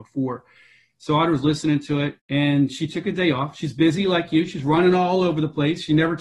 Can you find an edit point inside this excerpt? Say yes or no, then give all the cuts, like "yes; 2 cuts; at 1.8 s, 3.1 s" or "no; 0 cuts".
yes; 1 cut; at 2.2 s